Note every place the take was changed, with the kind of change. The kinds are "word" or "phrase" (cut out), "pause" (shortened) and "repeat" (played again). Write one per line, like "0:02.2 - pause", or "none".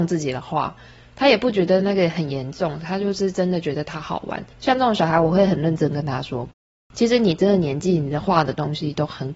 0:04.5 - pause